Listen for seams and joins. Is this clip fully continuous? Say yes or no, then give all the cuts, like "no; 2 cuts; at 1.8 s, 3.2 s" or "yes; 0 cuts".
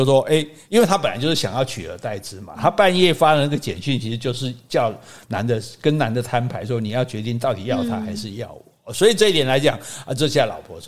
yes; 0 cuts